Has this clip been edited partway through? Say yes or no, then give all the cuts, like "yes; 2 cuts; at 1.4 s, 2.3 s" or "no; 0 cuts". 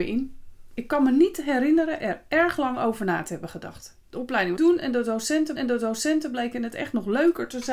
yes; 2 cuts; at 4.6 s, 5.6 s